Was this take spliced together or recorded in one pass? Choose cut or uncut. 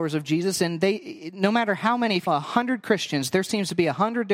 cut